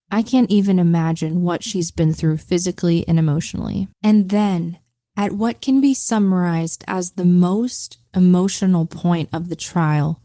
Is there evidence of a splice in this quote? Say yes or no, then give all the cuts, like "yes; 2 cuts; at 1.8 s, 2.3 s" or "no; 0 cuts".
yes; 1 cut; at 3.9 s